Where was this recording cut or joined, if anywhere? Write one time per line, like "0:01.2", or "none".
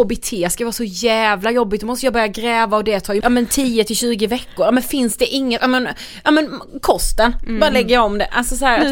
0:03.2